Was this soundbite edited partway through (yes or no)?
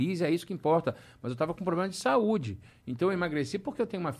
no